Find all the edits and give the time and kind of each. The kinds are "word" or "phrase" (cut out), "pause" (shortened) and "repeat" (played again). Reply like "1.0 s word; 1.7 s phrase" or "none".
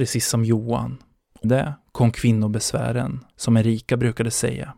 1.4 s word